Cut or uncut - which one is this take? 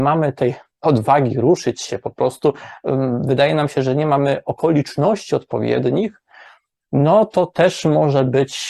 uncut